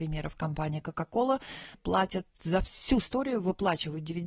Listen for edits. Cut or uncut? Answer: cut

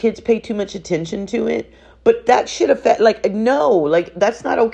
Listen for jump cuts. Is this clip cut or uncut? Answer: uncut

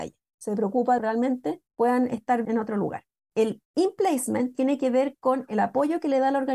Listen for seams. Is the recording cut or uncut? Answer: cut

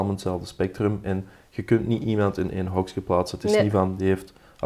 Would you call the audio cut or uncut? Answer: uncut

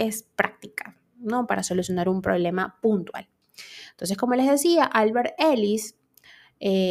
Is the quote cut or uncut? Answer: uncut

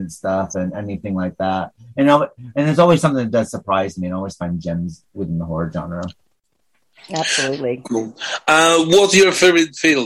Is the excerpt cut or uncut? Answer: uncut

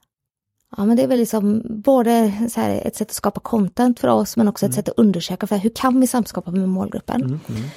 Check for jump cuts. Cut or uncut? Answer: uncut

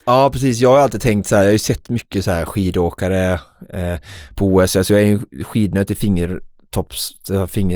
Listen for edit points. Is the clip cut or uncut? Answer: uncut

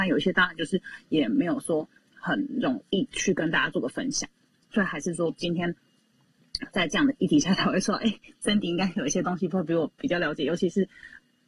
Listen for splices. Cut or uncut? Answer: uncut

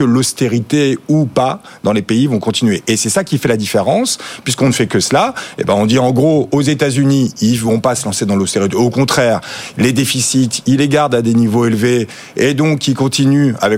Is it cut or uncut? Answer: uncut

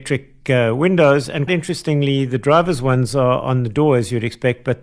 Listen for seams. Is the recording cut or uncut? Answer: cut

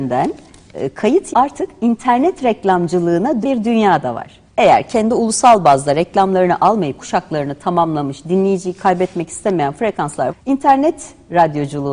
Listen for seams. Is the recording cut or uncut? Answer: cut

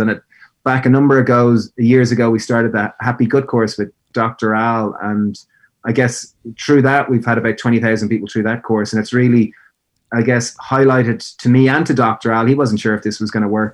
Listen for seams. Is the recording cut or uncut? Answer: uncut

